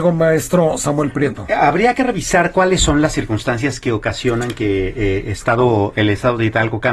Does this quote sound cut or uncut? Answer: uncut